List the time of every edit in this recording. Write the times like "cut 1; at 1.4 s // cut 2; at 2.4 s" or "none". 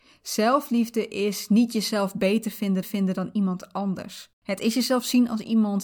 cut 1; at 2.8 s // cut 2; at 4.3 s